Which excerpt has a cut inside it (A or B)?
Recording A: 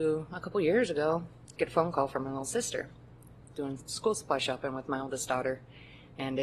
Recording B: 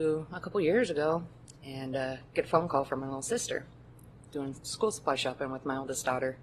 A